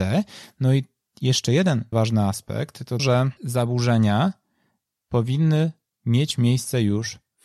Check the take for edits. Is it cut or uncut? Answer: cut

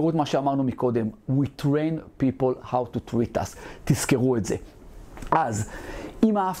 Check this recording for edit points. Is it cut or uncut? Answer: uncut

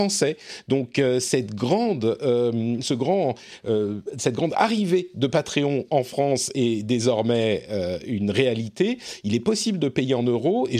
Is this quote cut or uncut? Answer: uncut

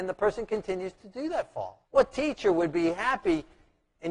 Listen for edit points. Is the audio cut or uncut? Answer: cut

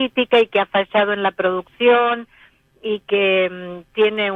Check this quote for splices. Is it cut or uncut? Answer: uncut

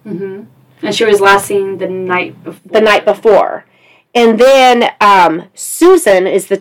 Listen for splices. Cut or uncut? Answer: uncut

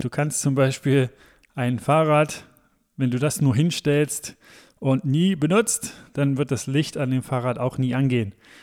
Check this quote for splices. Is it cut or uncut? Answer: uncut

